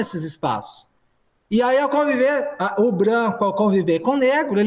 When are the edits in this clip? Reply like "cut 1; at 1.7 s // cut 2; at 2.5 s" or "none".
none